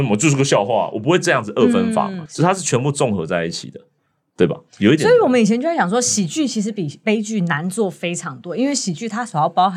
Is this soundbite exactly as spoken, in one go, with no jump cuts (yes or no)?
no